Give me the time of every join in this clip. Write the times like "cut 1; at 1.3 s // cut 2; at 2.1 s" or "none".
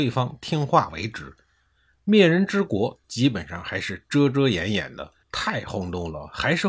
cut 1; at 3.0 s // cut 2; at 5.2 s